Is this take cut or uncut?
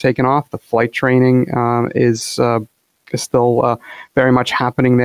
uncut